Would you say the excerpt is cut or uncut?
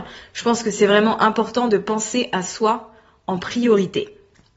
uncut